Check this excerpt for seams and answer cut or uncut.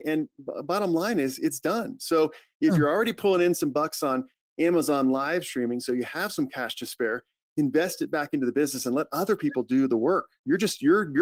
uncut